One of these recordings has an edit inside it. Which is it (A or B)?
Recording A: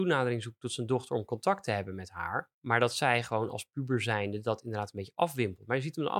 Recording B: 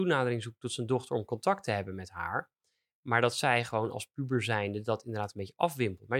A